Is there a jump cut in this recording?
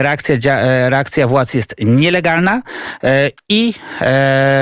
no; 0 cuts

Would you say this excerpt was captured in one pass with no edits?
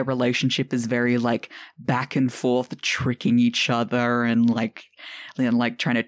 yes; 0 cuts

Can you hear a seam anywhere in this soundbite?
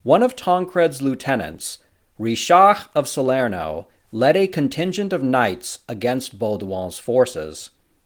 no; 0 cuts

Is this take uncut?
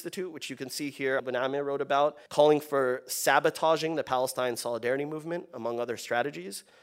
no; 2 cuts; at 1.2 s, 2.3 s

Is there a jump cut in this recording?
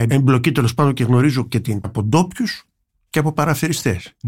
yes; 1 cut; at 1.8 s

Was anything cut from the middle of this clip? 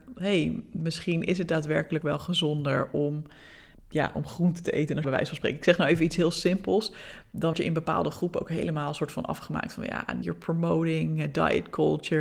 yes; 5 cuts; at 2.0 s, 3.7 s, 5.0 s, 7.5 s, 10.2 s

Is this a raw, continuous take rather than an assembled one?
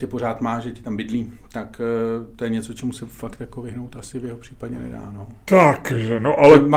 yes; 0 cuts

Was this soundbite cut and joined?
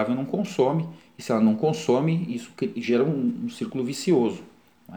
no; 0 cuts

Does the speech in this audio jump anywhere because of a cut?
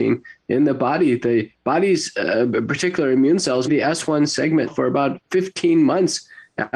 yes; 2 cuts; at 3.7 s, 4.7 s

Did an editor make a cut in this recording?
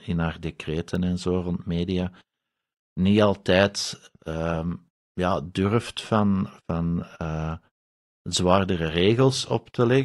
no; 0 cuts

